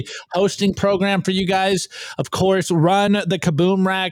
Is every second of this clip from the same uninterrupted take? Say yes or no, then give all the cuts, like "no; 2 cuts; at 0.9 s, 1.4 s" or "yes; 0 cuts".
yes; 0 cuts